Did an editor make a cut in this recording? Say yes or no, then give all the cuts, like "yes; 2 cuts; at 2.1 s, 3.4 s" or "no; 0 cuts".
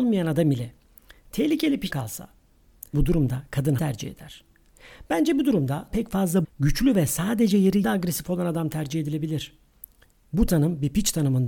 yes; 6 cuts; at 1.9 s, 2.9 s, 3.8 s, 5.9 s, 6.4 s, 7.8 s